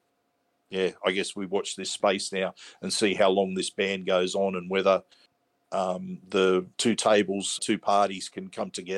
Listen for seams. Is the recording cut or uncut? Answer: cut